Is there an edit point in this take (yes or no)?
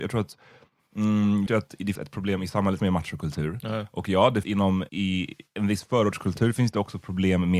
yes